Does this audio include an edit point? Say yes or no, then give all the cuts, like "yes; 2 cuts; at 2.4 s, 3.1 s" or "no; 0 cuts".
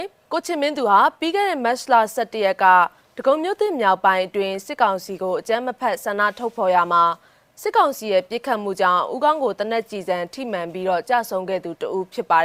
no; 0 cuts